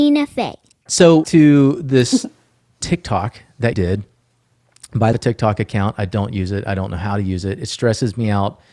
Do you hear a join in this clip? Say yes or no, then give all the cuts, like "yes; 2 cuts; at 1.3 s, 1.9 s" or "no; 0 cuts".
yes; 4 cuts; at 1.2 s, 2.4 s, 3.7 s, 5.1 s